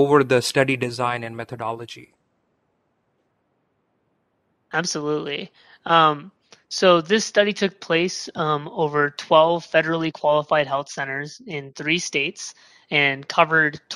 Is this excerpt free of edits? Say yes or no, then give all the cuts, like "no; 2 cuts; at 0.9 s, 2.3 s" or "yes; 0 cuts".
yes; 0 cuts